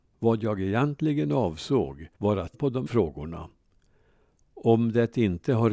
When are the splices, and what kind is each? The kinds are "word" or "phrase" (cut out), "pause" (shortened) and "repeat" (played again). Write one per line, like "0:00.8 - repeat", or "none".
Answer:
0:02.1 - pause
0:02.5 - phrase
0:02.9 - word